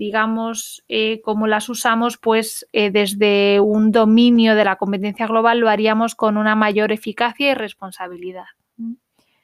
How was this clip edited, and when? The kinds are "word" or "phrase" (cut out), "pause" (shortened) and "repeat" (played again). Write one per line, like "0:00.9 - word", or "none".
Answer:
none